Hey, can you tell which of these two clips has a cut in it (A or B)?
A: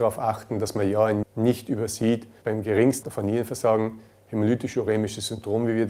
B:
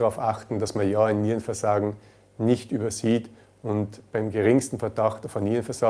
A